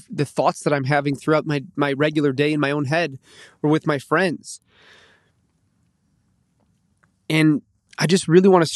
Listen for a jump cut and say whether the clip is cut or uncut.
uncut